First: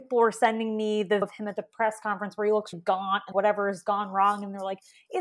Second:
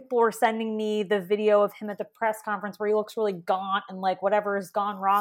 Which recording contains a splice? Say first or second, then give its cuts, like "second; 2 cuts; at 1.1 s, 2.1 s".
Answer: first; 3 cuts; at 1.2 s, 2.7 s, 3.3 s